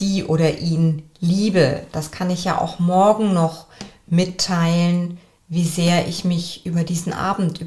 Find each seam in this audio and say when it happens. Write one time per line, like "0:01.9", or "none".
none